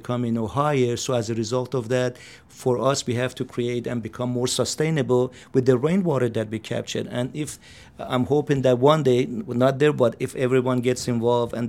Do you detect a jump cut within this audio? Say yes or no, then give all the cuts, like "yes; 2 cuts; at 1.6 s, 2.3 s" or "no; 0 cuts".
no; 0 cuts